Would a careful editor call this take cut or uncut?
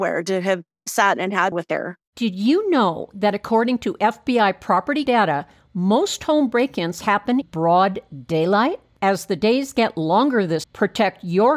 cut